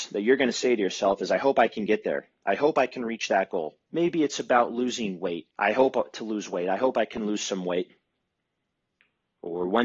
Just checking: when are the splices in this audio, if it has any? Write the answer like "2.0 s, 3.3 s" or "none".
3.8 s, 5.5 s